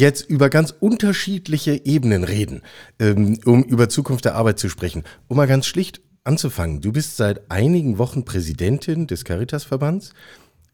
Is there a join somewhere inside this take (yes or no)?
no